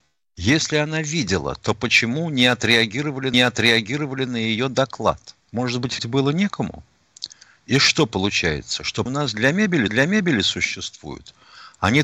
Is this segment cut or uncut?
cut